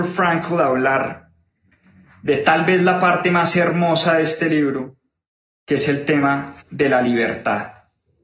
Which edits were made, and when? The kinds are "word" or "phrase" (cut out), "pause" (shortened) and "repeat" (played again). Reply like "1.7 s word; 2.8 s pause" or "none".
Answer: 6.6 s pause